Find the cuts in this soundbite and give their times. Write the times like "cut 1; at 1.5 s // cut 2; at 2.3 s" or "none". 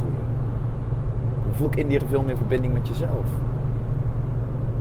cut 1; at 1.6 s // cut 2; at 2.0 s